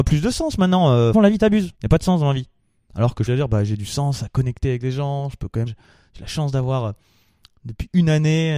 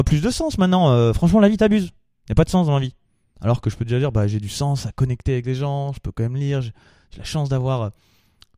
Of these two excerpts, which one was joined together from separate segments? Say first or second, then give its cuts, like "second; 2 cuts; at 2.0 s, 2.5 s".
first; 4 cuts; at 1.1 s, 1.8 s, 3.3 s, 5.7 s